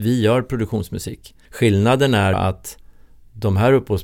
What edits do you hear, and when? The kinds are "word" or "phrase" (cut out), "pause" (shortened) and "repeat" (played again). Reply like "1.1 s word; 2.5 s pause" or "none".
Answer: 1.4 s pause; 2.3 s word

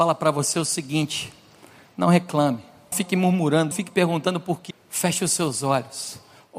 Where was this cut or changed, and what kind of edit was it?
2.9 s word; 3.7 s word; 4.7 s word

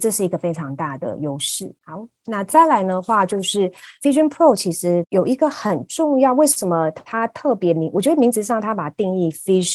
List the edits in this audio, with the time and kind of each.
1.8 s pause

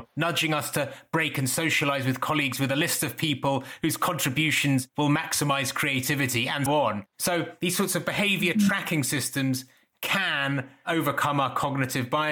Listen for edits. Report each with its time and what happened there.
6.7 s word

